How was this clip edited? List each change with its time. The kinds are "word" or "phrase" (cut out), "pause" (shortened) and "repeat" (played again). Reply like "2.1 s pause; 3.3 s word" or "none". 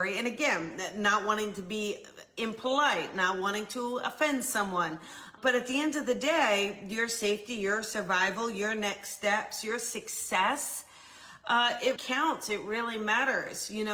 12.0 s word